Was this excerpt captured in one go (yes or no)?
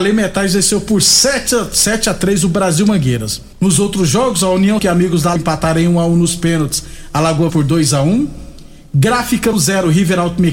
no